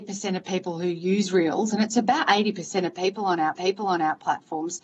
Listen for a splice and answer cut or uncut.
cut